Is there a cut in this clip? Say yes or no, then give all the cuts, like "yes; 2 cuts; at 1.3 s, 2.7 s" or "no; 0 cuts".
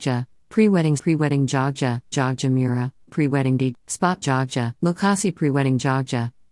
yes; 6 cuts; at 1.0 s, 2.1 s, 3.1 s, 3.7 s, 4.2 s, 4.8 s